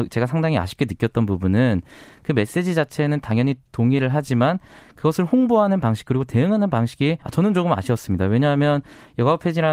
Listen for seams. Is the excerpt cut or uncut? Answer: cut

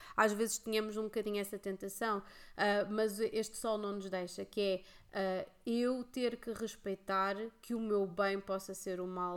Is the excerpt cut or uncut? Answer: uncut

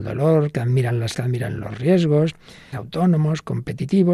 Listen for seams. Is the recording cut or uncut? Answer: cut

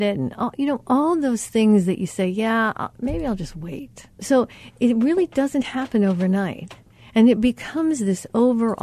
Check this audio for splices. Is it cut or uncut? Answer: cut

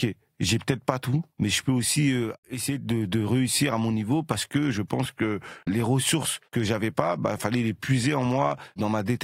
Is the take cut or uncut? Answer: cut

